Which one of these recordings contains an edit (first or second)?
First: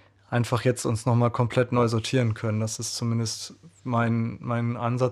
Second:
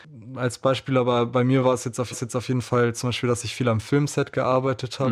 second